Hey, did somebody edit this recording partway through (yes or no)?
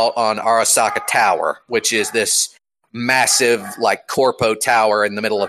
no